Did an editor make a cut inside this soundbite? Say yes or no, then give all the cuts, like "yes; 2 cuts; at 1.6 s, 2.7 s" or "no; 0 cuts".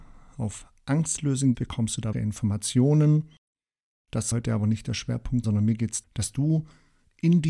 yes; 5 cuts; at 1.5 s, 2.1 s, 4.3 s, 5.4 s, 6.0 s